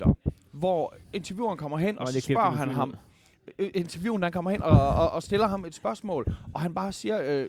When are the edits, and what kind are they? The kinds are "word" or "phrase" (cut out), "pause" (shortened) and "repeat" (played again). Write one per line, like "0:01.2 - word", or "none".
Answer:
0:01.0 - pause